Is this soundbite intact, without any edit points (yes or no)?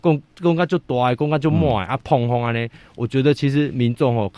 yes